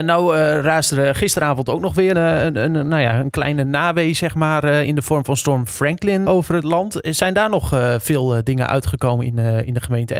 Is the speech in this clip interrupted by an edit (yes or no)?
yes